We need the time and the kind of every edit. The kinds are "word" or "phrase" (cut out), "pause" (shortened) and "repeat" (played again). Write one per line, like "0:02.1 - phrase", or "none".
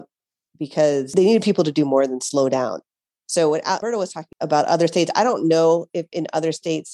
none